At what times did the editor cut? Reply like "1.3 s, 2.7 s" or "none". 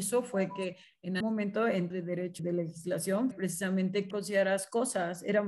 1.2 s, 1.9 s, 2.4 s, 3.3 s, 4.1 s